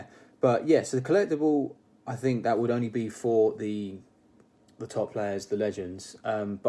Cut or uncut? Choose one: uncut